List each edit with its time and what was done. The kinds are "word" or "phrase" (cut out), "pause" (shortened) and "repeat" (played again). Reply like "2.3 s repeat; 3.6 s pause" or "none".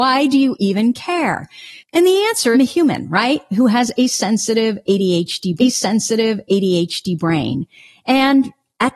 1.8 s pause; 2.5 s phrase; 5.6 s repeat